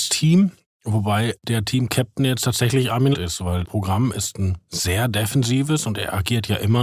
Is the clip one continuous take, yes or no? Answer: no